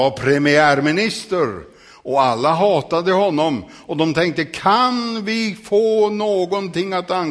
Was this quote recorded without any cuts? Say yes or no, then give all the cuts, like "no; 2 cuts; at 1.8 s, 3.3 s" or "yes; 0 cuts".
yes; 0 cuts